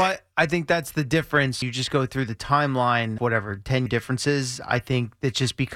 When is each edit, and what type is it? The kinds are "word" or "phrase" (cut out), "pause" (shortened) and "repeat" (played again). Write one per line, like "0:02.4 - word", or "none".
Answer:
0:01.6 - word
0:03.2 - word
0:03.9 - word